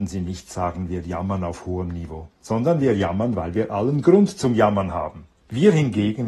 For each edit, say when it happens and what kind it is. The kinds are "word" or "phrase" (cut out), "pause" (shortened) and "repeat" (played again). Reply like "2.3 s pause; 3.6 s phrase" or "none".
2.4 s pause; 5.4 s pause